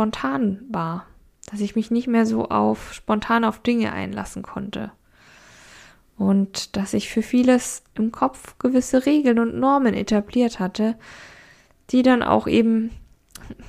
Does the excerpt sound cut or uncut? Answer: uncut